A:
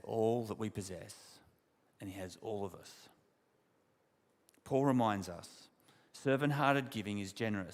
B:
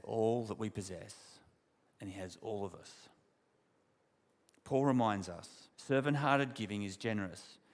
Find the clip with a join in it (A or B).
B